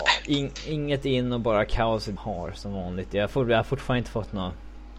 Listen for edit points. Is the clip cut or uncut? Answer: cut